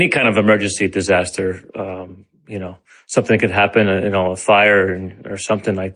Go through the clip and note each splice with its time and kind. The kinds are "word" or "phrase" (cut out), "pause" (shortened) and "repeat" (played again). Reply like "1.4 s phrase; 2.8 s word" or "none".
1.7 s pause; 2.9 s pause